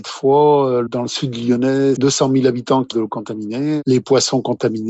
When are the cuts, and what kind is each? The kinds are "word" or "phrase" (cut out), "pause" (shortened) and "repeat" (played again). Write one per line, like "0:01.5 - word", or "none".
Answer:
0:02.0 - word
0:02.9 - word